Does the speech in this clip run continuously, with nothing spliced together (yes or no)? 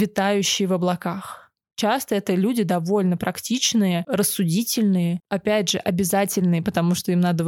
yes